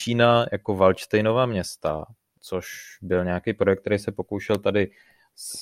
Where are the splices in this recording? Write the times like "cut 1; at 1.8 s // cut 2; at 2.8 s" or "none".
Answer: none